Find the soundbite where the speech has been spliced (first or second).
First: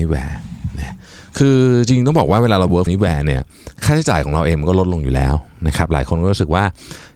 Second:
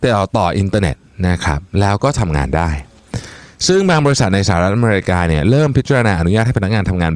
first